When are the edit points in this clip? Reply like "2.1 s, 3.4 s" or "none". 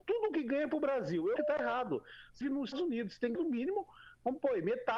1.4 s, 2.4 s, 2.7 s, 3.3 s